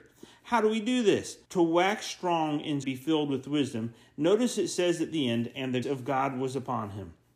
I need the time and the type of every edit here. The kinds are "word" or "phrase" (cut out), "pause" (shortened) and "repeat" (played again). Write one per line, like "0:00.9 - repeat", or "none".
0:01.4 - pause
0:02.8 - phrase
0:05.8 - word